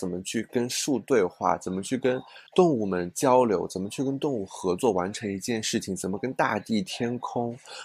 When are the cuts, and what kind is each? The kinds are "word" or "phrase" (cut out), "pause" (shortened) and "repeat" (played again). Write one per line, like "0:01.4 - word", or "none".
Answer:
0:02.5 - pause

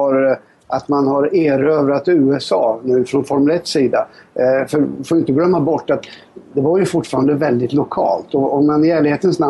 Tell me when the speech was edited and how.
none

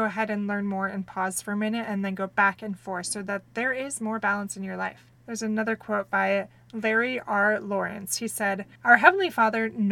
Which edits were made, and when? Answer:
0:03.5 - pause
0:05.2 - pause
0:08.7 - pause

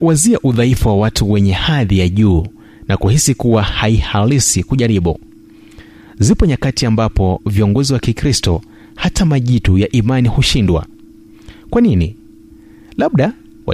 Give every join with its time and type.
none

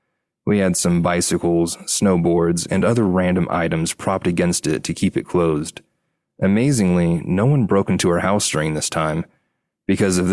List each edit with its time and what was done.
none

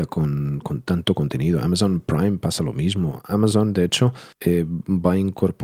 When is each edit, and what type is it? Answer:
0:04.3 - pause

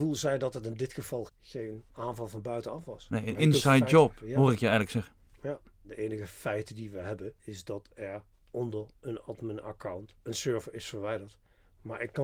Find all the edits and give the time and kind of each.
0:01.3 - word
0:01.9 - pause
0:07.4 - word
0:08.3 - pause
0:10.2 - pause

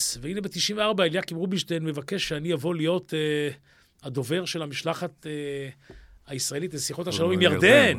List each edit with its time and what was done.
none

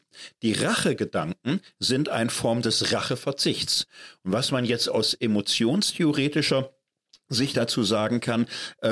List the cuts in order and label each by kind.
none

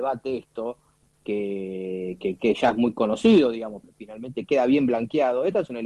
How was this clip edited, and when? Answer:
0:03.8 - phrase

